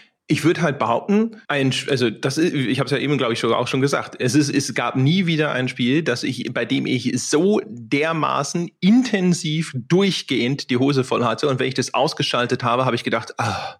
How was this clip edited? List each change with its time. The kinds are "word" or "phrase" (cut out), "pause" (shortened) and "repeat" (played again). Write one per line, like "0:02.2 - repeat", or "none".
0:01.4 - pause